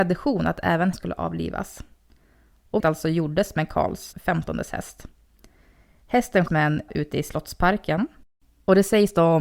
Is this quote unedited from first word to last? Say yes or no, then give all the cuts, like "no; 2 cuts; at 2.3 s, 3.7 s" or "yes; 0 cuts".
no; 5 cuts; at 0.9 s, 2.8 s, 4.1 s, 6.5 s, 6.9 s